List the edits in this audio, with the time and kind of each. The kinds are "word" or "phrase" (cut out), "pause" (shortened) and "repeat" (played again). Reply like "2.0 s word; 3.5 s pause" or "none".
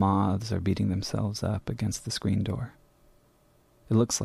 none